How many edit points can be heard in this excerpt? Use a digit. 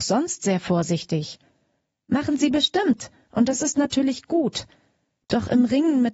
0